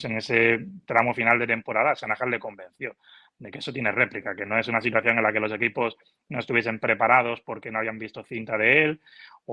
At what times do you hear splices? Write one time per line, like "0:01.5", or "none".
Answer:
none